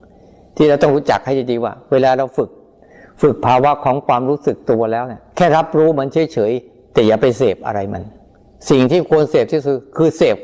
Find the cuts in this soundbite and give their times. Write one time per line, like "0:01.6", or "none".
0:08.3

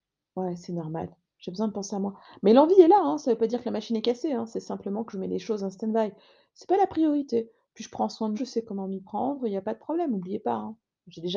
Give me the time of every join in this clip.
0:08.3

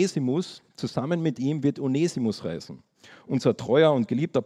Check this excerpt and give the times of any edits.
none

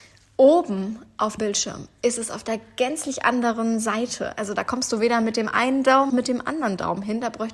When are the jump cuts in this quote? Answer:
0:01.4
0:06.1

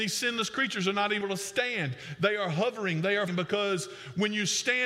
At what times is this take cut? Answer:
0:01.2
0:03.3

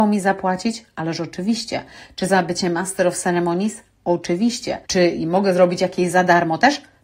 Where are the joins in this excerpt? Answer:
0:04.8

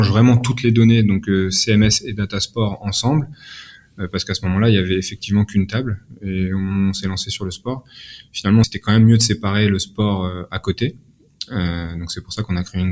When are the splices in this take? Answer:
0:08.6

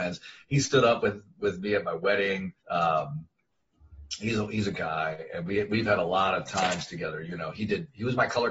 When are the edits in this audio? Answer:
0:02.6
0:04.7

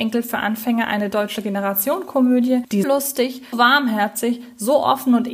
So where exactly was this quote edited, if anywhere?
0:02.8
0:03.5

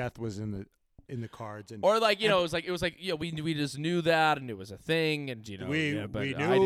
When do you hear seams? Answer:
none

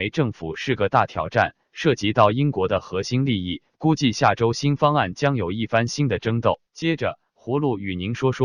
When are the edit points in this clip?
0:06.7

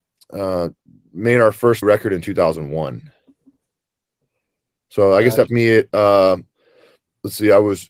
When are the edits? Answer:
0:01.8
0:05.5

